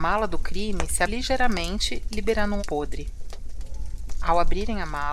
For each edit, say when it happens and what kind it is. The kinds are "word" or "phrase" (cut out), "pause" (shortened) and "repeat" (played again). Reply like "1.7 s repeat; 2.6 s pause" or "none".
1.1 s word; 2.6 s word

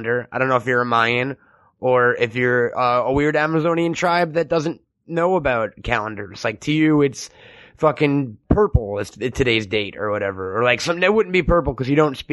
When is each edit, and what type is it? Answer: none

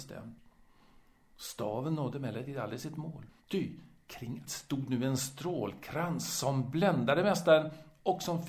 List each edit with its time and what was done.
3.4 s pause; 4.4 s word

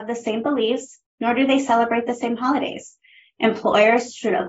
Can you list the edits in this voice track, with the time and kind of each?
none

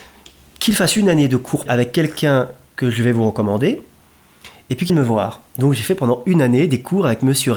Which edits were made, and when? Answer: 1.7 s word; 4.9 s word

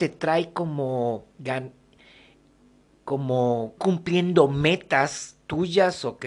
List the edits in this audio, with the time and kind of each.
3.8 s word

